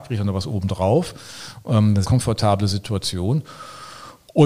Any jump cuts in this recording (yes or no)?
yes